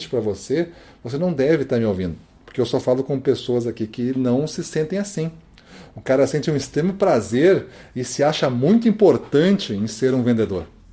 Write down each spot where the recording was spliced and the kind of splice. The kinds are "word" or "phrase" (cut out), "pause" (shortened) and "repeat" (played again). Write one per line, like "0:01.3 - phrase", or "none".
none